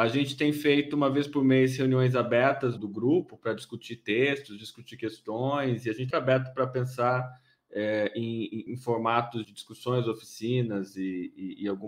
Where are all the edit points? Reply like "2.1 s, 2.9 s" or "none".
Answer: 2.8 s, 6.1 s, 8.7 s, 9.4 s